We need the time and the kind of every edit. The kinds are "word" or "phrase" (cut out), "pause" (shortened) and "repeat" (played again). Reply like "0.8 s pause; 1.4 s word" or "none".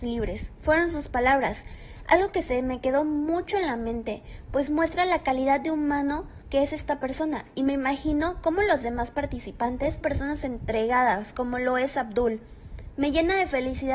4.7 s word; 6.4 s pause; 10.0 s phrase

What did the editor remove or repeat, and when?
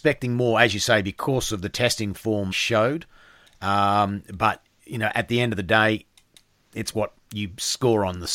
2.5 s word

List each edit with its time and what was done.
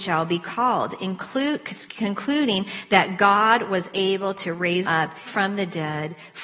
4.8 s word; 5.3 s word

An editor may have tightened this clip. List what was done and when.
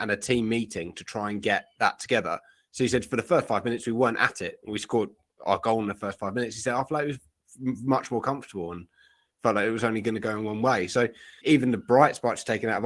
11.4 s word

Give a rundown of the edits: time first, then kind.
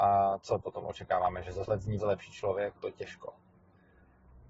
1.6 s word; 2.0 s word; 2.8 s word

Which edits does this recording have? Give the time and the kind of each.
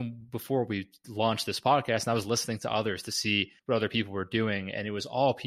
3.6 s pause

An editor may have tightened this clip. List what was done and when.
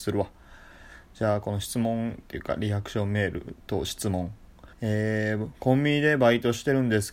3.6 s pause; 4.7 s pause

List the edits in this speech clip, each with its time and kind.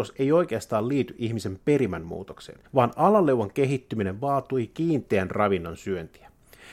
2.7 s pause

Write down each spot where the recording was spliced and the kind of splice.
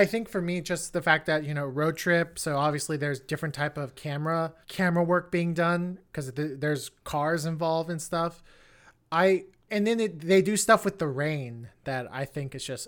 4.6 s pause; 7.0 s pause; 9.7 s word

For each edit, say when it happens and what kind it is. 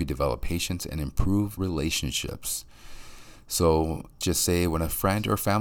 1.6 s word; 4.2 s word

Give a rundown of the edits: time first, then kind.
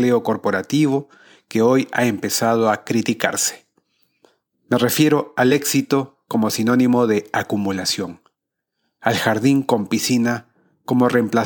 none

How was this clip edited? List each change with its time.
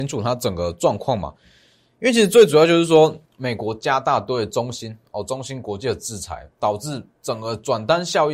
3.3 s pause; 6.5 s pause

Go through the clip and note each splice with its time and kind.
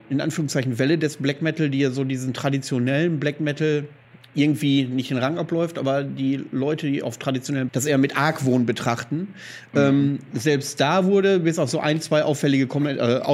4.0 s pause; 7.7 s phrase

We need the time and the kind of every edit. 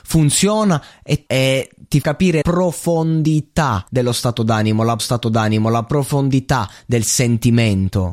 1.3 s phrase; 2.0 s word; 2.4 s word; 3.9 s pause; 5.0 s repeat

